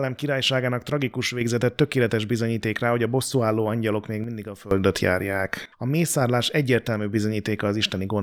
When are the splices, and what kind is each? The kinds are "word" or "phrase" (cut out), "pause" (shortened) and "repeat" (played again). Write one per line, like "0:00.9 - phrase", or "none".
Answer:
0:05.7 - pause

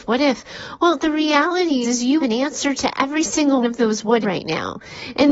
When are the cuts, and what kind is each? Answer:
0:01.8 - word
0:02.2 - word
0:03.6 - word
0:04.2 - word

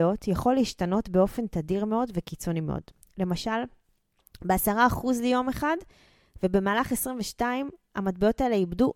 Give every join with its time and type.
none

